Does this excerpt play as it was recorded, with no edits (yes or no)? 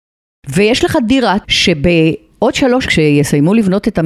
no